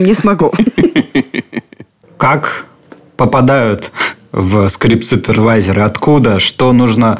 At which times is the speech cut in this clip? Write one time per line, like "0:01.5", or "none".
none